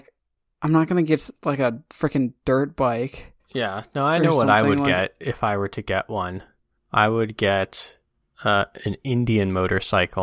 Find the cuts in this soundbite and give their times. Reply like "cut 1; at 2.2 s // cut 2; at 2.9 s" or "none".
cut 1; at 3.4 s